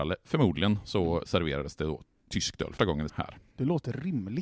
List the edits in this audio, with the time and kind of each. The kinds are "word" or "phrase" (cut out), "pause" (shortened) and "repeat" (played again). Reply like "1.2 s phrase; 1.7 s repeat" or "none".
2.8 s word; 3.1 s word